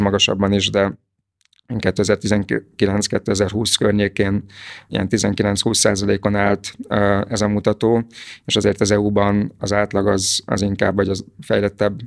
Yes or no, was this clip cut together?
no